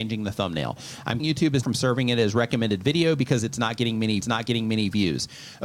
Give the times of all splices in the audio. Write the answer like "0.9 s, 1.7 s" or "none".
1.2 s, 1.6 s, 4.2 s